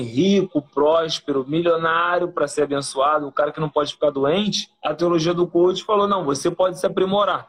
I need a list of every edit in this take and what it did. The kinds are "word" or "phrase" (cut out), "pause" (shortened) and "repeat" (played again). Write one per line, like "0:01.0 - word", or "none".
0:04.7 - pause